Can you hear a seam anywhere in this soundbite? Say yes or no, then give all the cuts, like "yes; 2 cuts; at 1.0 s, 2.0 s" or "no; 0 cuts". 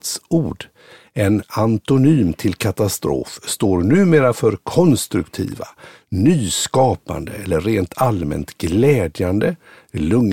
no; 0 cuts